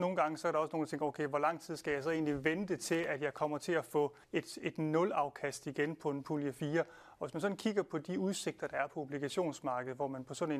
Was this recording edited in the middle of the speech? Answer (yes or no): yes